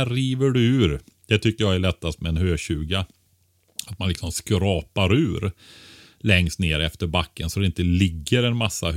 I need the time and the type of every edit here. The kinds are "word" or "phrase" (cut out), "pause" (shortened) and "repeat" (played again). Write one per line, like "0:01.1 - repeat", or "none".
none